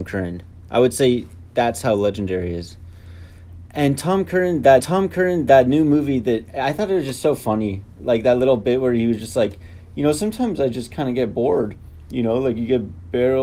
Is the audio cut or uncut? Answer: cut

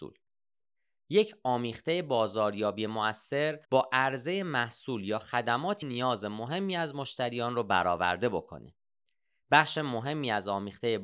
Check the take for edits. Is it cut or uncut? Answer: cut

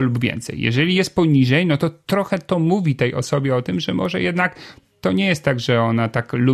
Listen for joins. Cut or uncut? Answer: uncut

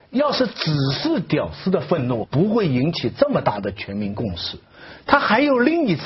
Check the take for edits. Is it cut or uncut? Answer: cut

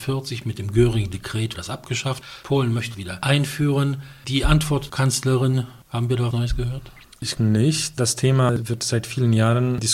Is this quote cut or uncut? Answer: cut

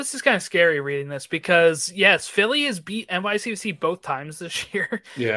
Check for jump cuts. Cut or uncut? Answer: uncut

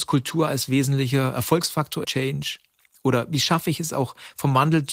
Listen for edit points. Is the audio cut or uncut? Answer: cut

